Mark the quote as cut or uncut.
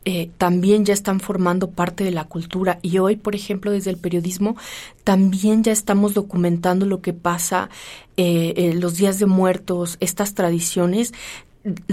uncut